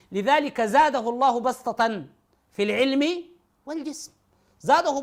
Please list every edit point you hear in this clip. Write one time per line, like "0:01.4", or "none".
none

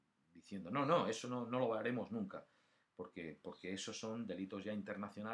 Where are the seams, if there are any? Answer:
none

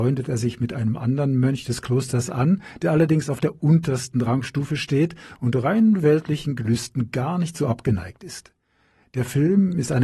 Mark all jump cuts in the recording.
none

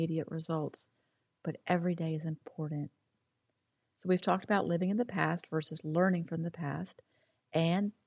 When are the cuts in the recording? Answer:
none

